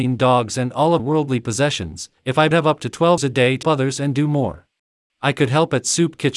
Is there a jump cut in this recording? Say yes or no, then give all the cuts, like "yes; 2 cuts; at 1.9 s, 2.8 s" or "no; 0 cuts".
yes; 6 cuts; at 1.0 s, 2.2 s, 2.5 s, 3.2 s, 3.6 s, 4.9 s